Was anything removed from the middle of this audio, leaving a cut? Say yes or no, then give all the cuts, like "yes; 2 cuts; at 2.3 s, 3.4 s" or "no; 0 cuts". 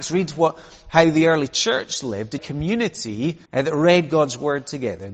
yes; 2 cuts; at 2.4 s, 3.5 s